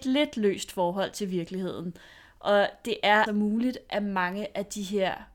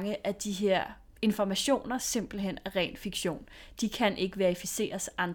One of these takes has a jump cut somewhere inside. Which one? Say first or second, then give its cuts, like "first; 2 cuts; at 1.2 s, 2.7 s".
first; 1 cut; at 3.3 s